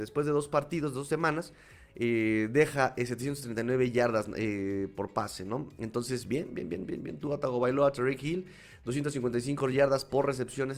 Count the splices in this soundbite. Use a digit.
0